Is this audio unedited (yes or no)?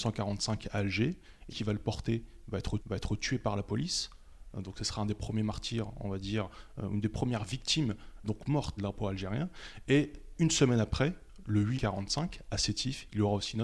no